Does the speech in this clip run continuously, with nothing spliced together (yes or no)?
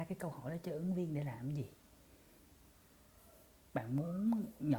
yes